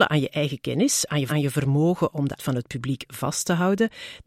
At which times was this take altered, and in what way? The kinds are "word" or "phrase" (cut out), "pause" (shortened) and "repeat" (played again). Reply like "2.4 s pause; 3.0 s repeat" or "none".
1.3 s word; 2.4 s word